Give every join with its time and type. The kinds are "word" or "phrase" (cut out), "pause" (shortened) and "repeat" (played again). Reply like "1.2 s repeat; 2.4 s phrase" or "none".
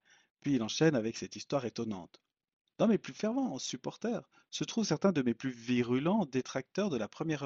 2.3 s pause